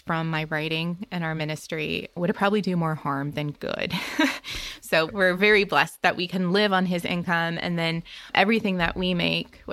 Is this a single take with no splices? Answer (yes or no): yes